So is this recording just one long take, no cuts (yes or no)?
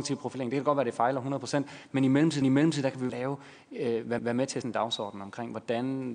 no